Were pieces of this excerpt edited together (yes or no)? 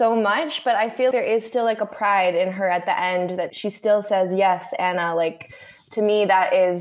yes